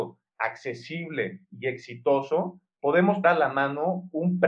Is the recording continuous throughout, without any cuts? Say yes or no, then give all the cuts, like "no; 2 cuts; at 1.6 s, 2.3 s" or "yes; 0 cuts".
no; 1 cut; at 3.2 s